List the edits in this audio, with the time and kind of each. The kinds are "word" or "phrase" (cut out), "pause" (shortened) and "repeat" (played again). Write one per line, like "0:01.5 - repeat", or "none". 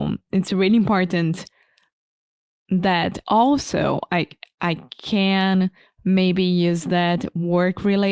none